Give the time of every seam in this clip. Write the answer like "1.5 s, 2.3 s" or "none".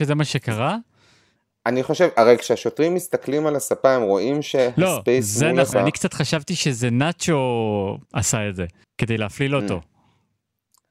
2.2 s, 5.7 s, 8.0 s, 8.8 s